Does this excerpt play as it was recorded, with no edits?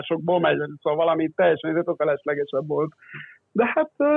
no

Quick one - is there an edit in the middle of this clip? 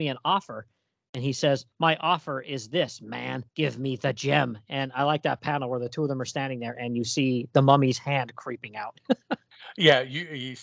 yes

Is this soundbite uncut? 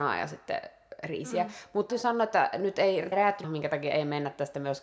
no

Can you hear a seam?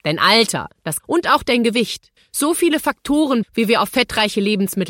yes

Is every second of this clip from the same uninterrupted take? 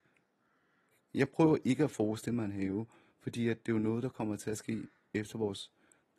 yes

